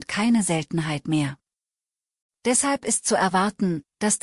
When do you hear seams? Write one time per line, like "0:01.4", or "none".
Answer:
none